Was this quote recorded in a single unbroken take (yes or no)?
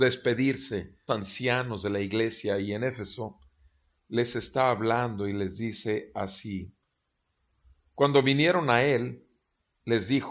no